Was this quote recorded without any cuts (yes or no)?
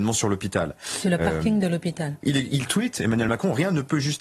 yes